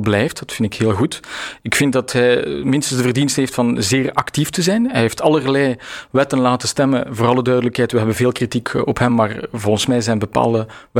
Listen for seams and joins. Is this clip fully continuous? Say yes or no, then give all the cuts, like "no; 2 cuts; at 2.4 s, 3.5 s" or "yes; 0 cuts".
yes; 0 cuts